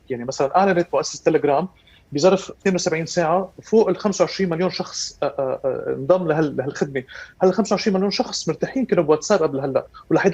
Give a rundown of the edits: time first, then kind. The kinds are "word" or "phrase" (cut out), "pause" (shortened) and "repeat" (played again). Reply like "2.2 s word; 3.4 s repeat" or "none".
2.6 s word